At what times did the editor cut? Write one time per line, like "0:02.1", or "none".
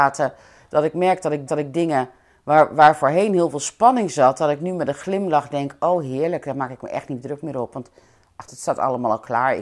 0:01.5
0:08.5